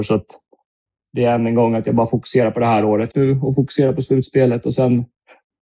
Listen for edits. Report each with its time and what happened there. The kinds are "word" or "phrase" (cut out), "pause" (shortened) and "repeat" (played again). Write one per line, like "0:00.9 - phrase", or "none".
0:03.1 - word